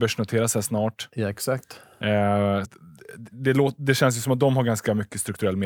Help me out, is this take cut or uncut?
cut